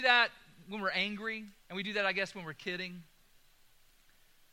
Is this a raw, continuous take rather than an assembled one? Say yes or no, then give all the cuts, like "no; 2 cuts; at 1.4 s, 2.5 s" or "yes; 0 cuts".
no; 1 cut; at 1.6 s